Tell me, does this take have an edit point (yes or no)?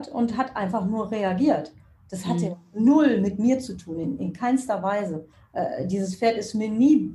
yes